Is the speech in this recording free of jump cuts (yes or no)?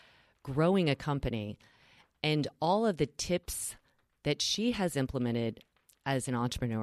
yes